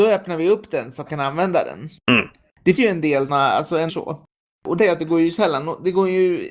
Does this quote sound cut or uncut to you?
cut